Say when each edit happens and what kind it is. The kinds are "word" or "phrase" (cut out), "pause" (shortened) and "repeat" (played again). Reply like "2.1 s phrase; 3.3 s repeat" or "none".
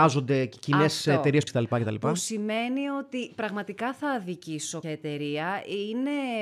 1.5 s word; 4.8 s word